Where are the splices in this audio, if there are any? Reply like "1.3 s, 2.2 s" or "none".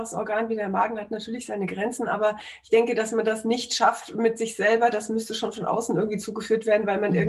none